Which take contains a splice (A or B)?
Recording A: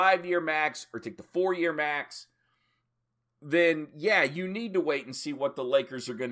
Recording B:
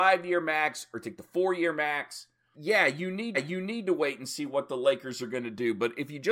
B